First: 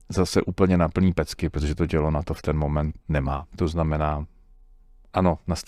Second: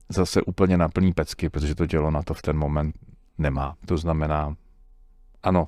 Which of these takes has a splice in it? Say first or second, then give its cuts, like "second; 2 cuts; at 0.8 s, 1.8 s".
first; 1 cut; at 3.0 s